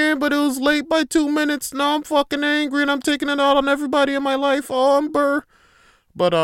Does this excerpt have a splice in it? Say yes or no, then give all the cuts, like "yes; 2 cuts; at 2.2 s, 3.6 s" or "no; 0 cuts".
yes; 1 cut; at 5.1 s